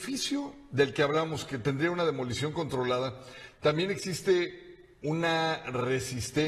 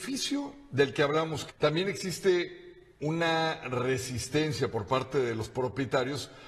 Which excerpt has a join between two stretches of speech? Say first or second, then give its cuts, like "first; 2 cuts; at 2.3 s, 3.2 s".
second; 1 cut; at 1.5 s